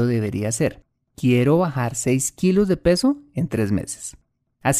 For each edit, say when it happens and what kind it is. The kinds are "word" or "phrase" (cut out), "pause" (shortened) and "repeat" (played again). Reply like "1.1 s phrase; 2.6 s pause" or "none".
none